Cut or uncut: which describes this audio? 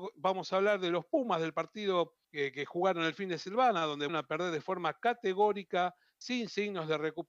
cut